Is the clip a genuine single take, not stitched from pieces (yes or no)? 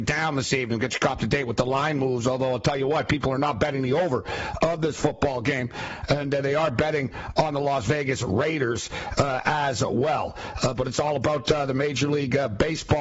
yes